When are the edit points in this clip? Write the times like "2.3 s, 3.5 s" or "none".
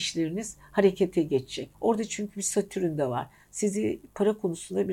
1.7 s